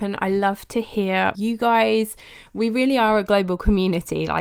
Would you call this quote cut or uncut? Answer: cut